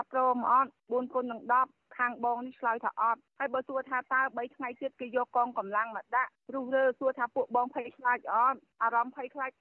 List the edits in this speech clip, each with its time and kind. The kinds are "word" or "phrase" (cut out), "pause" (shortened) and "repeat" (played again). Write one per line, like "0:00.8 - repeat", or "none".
none